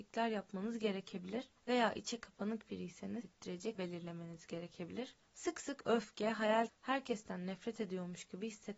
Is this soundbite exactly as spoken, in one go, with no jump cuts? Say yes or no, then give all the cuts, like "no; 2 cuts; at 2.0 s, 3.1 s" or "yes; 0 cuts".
no; 5 cuts; at 1.6 s, 3.2 s, 3.7 s, 5.2 s, 6.7 s